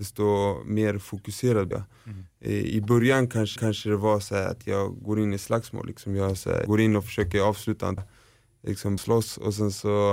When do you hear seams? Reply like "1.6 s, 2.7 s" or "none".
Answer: 1.7 s, 3.6 s, 6.7 s, 8.0 s, 9.0 s